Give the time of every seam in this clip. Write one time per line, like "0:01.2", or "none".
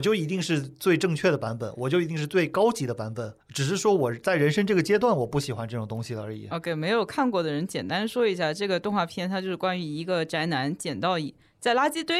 0:03.4